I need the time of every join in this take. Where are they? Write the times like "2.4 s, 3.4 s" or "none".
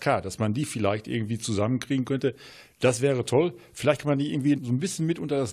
4.6 s